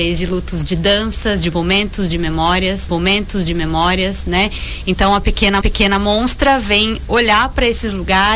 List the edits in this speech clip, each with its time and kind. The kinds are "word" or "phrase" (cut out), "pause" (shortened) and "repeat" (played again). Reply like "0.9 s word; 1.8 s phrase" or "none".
2.9 s repeat; 5.6 s repeat